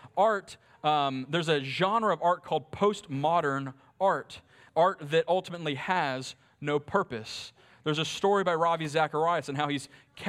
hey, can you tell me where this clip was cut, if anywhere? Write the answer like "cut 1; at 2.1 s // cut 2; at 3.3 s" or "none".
none

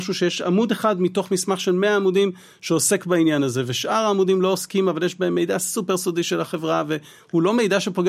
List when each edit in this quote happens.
none

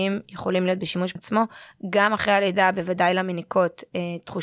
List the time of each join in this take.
cut 1; at 1.2 s

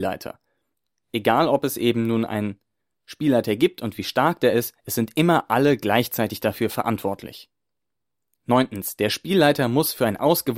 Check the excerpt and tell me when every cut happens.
none

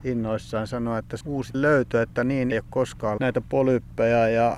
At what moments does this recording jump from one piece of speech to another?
cut 1; at 1.2 s // cut 2; at 1.5 s // cut 3; at 2.5 s // cut 4; at 3.2 s

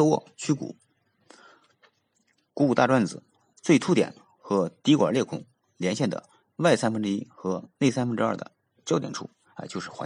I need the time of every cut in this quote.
none

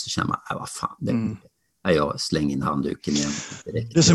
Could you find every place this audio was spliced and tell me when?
none

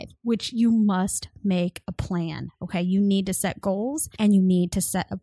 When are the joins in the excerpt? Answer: none

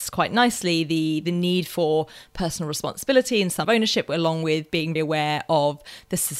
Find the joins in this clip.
cut 1; at 3.6 s // cut 2; at 5.0 s

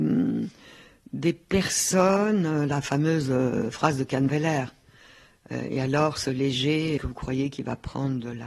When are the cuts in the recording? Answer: cut 1; at 7.0 s

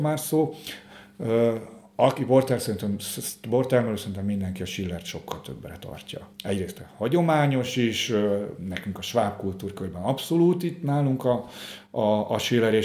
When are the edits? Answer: cut 1; at 6.3 s

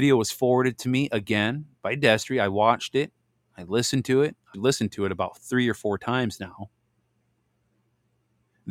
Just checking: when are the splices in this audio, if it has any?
cut 1; at 4.5 s

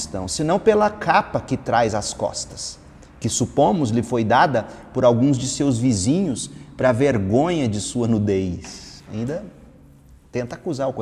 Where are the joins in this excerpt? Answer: cut 1; at 6.8 s

